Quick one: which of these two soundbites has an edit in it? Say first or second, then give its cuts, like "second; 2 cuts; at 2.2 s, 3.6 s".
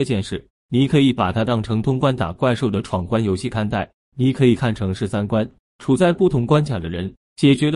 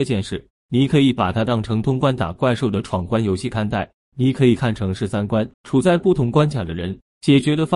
second; 1 cut; at 5.5 s